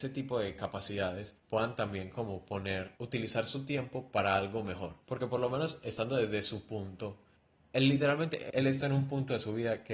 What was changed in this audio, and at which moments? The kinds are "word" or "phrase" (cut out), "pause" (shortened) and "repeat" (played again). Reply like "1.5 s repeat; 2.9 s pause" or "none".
1.4 s pause; 3.0 s pause; 5.0 s pause; 7.4 s pause; 8.5 s word